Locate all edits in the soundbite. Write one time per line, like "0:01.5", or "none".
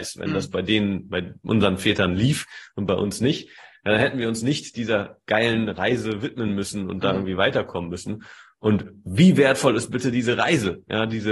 none